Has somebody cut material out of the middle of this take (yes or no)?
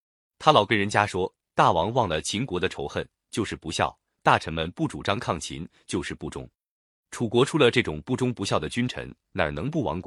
no